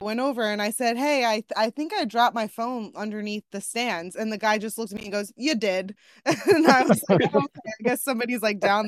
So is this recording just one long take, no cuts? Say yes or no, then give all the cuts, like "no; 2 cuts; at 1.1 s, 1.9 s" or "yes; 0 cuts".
yes; 0 cuts